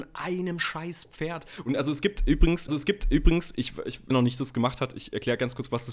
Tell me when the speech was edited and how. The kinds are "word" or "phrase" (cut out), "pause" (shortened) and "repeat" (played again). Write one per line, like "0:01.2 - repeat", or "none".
0:02.7 - repeat
0:04.1 - phrase